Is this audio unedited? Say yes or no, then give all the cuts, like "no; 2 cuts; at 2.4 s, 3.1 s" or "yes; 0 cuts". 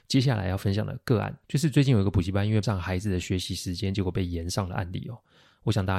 no; 2 cuts; at 1.4 s, 2.6 s